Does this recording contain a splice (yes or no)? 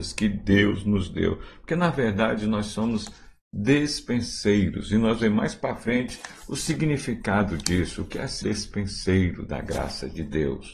yes